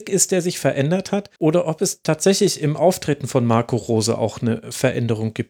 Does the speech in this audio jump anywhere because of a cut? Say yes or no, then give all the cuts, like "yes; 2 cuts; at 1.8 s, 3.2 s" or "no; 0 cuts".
yes; 1 cut; at 1.4 s